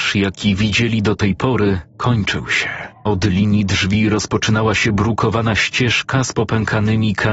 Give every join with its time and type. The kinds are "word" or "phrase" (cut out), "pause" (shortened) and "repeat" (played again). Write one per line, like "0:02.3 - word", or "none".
0:01.9 - pause
0:03.0 - pause

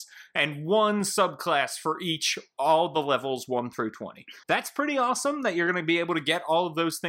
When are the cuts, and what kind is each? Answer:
0:04.4 - pause

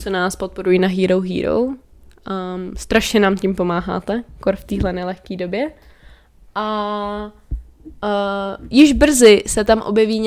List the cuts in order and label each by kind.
none

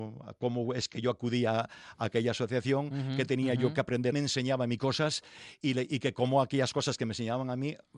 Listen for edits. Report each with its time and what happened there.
0:04.1 - phrase

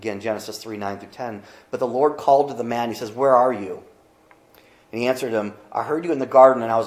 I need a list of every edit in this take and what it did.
none

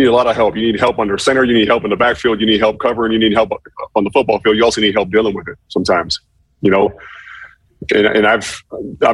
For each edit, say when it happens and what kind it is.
none

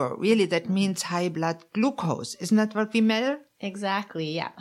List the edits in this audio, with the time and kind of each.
none

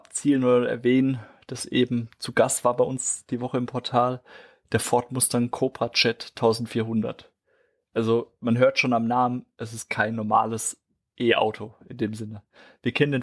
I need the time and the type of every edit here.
none

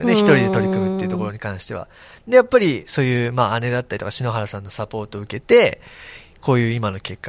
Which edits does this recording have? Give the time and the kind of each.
none

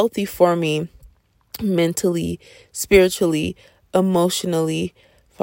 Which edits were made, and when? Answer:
none

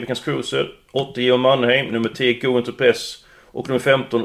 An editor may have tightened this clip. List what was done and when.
none

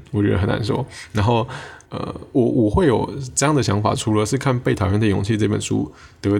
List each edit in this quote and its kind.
0:01.8 - pause

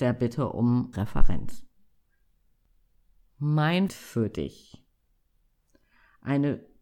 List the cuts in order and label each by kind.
0:00.9 - word
0:03.9 - word

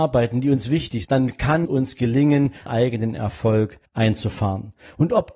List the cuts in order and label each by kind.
0:01.0 - word
0:01.7 - word
0:02.7 - phrase
0:03.9 - pause

